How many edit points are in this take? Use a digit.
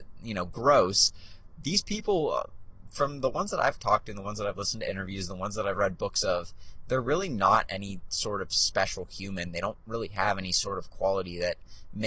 0